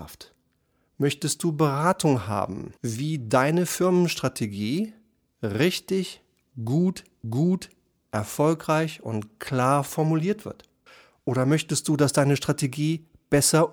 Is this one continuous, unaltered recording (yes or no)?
no